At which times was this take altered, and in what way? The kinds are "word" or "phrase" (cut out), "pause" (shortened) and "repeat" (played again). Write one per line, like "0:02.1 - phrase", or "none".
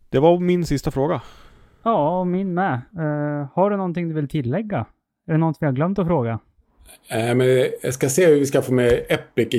none